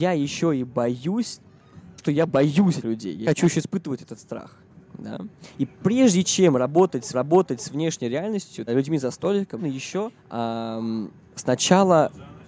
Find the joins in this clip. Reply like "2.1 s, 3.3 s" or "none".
2.0 s, 2.8 s, 3.2 s, 5.5 s, 7.1 s, 8.7 s, 9.6 s, 10.2 s